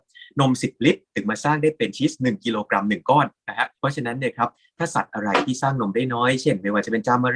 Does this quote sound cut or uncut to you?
cut